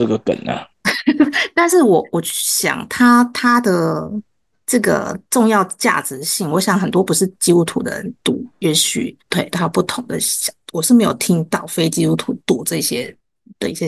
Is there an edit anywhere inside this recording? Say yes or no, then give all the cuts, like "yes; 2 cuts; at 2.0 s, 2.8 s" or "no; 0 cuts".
yes; 2 cuts; at 9.2 s, 12.4 s